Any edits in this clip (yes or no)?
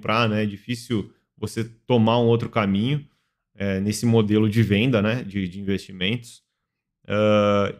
no